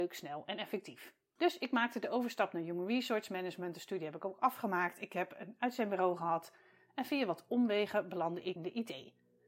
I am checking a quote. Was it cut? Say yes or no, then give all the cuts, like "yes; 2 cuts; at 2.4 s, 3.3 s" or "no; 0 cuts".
yes; 1 cut; at 8.6 s